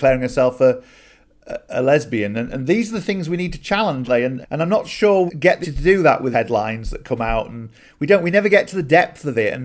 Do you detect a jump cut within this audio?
yes; 5 cuts; at 4.0 s, 4.4 s, 5.3 s, 5.6 s, 6.3 s

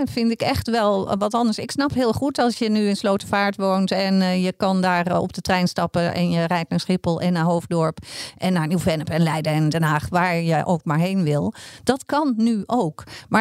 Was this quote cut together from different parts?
no; 0 cuts

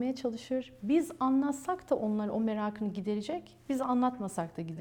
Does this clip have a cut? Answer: no; 0 cuts

